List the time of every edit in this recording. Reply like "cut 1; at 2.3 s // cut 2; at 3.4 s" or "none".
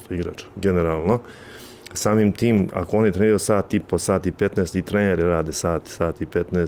none